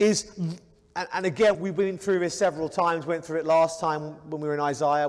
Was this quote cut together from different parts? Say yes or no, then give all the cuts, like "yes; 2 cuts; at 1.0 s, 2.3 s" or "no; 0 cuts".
yes; 1 cut; at 1.5 s